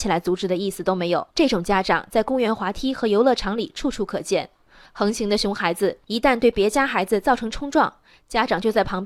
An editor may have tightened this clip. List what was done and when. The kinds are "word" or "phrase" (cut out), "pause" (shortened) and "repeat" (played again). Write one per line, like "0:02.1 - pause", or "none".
0:01.3 - pause